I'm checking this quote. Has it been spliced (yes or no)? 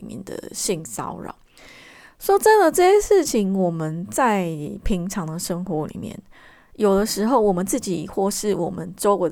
no